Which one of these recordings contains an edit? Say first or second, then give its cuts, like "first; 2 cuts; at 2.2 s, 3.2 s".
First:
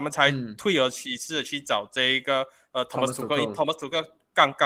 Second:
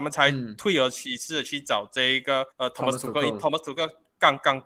second; 1 cut; at 2.5 s